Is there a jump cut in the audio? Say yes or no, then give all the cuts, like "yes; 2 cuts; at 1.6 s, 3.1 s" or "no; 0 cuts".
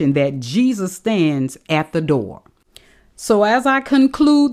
no; 0 cuts